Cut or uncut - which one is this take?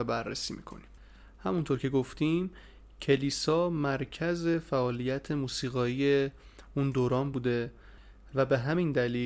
uncut